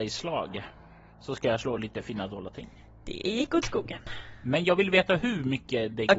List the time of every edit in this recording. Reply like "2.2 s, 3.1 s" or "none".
none